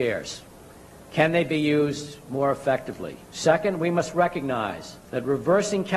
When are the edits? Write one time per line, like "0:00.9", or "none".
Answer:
0:03.2
0:05.0